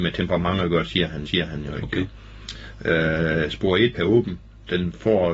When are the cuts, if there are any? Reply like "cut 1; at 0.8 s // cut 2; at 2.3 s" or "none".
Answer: cut 1; at 1.3 s // cut 2; at 3.9 s

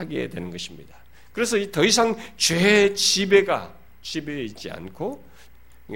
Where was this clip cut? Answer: none

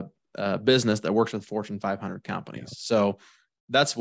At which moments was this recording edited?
none

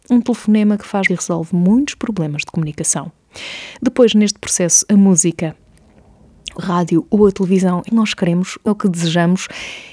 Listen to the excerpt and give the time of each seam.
cut 1; at 1.1 s // cut 2; at 6.6 s // cut 3; at 7.9 s // cut 4; at 8.7 s

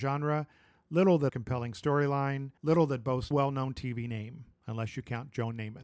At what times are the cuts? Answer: cut 1; at 1.3 s // cut 2; at 2.6 s // cut 3; at 3.3 s

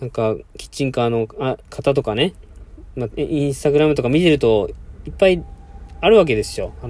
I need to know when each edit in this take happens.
cut 1; at 1.6 s

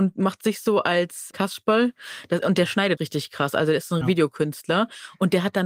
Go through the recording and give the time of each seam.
cut 1; at 1.3 s // cut 2; at 3.0 s // cut 3; at 4.0 s

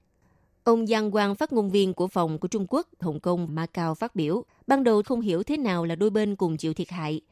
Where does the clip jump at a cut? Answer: cut 1; at 2.1 s // cut 2; at 3.0 s // cut 3; at 3.5 s // cut 4; at 4.5 s // cut 5; at 5.0 s

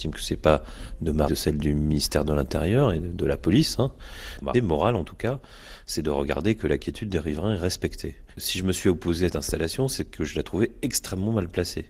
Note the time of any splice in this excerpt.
cut 1; at 1.3 s // cut 2; at 4.5 s // cut 3; at 8.3 s // cut 4; at 9.3 s

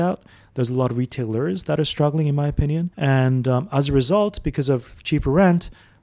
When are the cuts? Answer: cut 1; at 2.9 s

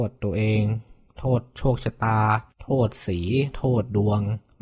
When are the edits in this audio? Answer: cut 1; at 2.5 s

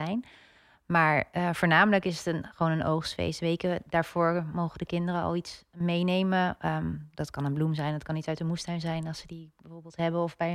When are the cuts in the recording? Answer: none

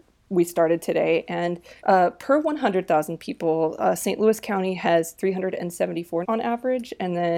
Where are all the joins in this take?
cut 1; at 1.8 s // cut 2; at 6.2 s

